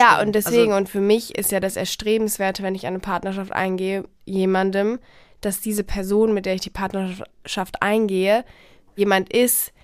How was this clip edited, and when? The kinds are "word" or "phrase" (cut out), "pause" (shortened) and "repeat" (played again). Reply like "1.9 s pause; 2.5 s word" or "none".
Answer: 4.2 s word